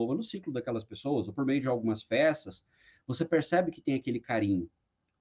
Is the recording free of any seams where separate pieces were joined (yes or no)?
yes